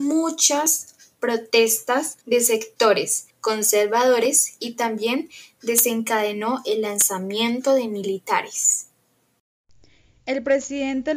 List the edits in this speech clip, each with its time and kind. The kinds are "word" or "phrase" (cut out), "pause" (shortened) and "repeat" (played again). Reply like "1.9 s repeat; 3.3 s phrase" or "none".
2.2 s pause; 3.3 s pause